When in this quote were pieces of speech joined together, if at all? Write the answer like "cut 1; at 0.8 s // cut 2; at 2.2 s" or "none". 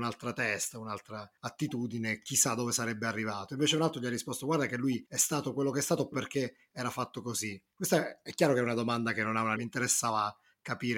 cut 1; at 1.4 s // cut 2; at 5.1 s // cut 3; at 6.1 s // cut 4; at 7.7 s // cut 5; at 9.6 s